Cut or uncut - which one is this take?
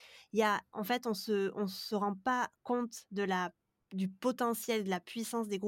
uncut